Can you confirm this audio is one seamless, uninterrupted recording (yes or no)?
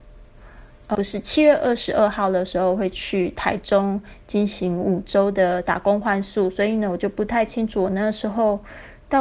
no